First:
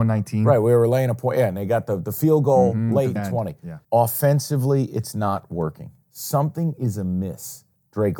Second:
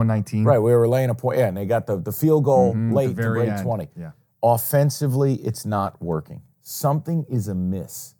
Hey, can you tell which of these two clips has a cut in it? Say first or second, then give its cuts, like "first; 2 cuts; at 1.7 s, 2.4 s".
first; 2 cuts; at 3.2 s, 3.8 s